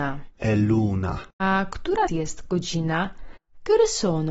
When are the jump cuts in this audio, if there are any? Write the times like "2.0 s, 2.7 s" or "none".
1.3 s, 2.1 s